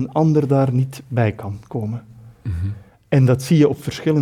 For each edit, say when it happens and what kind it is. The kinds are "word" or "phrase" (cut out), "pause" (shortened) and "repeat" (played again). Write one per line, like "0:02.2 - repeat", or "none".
none